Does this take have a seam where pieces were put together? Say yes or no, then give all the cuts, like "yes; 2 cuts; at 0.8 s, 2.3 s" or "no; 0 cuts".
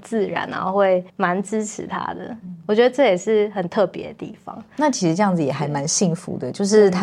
yes; 1 cut; at 1.1 s